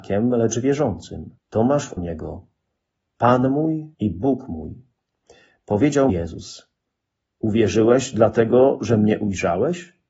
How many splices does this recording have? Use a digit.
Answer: 4